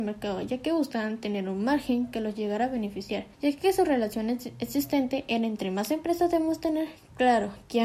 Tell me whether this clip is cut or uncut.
cut